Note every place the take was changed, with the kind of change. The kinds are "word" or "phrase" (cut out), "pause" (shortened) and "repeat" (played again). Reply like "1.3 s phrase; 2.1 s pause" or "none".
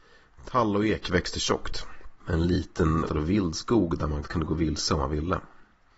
3.1 s word; 4.2 s word